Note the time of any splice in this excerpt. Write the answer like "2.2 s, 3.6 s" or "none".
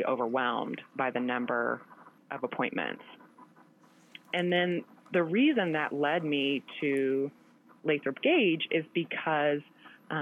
none